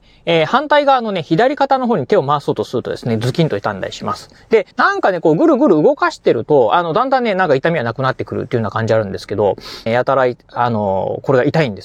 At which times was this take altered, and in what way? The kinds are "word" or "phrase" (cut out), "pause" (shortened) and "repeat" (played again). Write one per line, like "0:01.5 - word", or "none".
0:04.7 - pause
0:09.9 - phrase